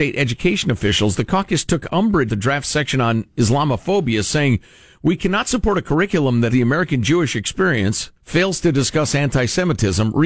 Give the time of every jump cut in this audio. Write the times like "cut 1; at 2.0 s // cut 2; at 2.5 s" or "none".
cut 1; at 2.3 s // cut 2; at 6.5 s // cut 3; at 8.2 s